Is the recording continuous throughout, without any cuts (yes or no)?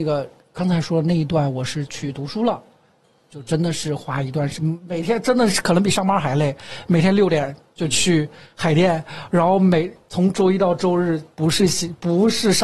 yes